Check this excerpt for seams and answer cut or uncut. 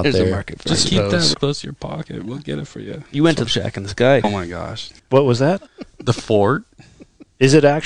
cut